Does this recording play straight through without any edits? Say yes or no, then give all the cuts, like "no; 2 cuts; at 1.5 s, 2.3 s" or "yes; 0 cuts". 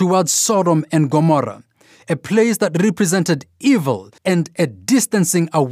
no; 1 cut; at 4.2 s